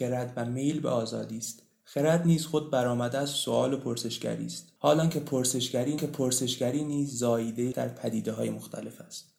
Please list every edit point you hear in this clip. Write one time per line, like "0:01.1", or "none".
0:04.8
0:06.0
0:07.7